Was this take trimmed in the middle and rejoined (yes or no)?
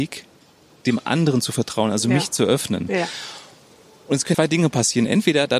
yes